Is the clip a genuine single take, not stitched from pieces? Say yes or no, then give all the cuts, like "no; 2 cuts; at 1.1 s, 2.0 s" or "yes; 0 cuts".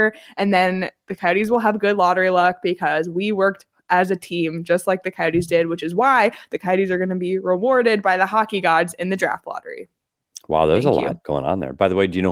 yes; 0 cuts